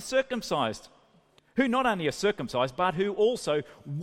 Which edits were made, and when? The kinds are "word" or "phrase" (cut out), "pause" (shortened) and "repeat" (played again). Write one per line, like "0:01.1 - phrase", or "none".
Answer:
0:01.4 - word